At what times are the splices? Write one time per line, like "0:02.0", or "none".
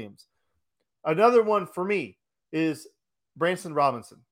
none